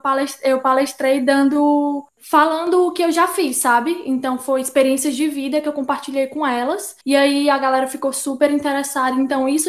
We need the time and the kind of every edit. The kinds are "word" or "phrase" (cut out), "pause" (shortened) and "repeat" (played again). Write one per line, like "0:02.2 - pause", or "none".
0:07.0 - pause